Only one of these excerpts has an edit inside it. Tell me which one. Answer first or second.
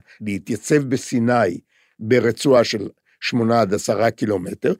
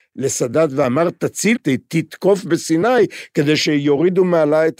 second